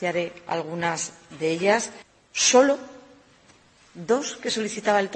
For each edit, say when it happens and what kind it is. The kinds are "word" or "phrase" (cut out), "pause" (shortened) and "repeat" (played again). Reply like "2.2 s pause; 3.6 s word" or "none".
2.0 s pause